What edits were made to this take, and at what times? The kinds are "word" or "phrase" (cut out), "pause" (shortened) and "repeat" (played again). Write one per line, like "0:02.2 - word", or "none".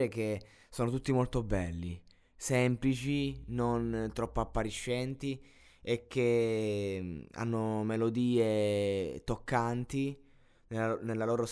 none